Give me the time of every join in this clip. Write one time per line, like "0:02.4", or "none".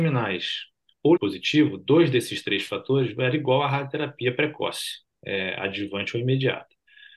0:01.2
0:05.2